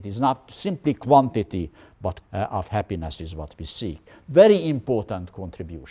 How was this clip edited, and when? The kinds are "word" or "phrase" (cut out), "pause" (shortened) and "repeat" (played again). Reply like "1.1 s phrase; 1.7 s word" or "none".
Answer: 2.2 s word